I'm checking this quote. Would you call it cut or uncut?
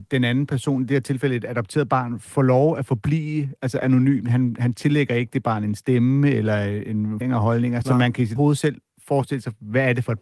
cut